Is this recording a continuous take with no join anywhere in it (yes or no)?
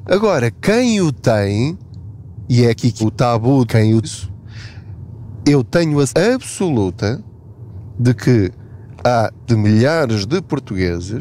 no